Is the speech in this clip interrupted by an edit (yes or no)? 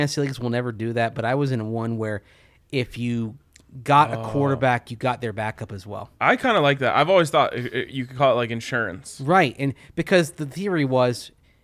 no